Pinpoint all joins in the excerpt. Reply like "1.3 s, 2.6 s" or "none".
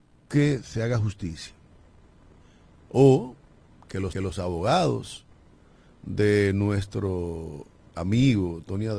4.1 s